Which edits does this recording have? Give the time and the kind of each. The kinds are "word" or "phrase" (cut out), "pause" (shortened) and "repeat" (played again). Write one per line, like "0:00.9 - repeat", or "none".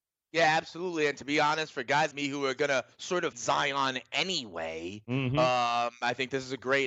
0:02.1 - word
0:02.9 - pause
0:03.3 - word